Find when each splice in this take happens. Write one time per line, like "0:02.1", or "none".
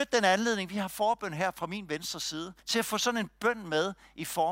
0:02.6